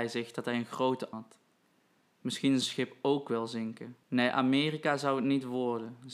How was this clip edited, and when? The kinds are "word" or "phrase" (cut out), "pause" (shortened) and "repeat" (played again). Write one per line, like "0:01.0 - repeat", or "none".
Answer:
0:01.1 - phrase
0:02.6 - phrase
0:04.0 - pause